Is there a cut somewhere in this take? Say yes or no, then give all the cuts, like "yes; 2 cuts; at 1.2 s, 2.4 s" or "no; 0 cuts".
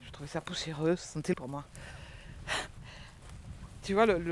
yes; 1 cut; at 1.3 s